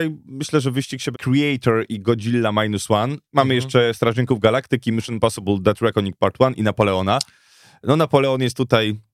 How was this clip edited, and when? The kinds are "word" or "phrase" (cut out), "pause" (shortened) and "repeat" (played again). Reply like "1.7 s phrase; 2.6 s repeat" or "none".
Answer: 1.1 s phrase